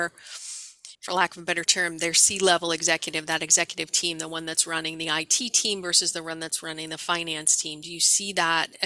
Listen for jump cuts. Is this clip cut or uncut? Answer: cut